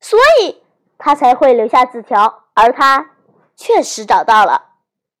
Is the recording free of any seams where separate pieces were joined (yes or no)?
no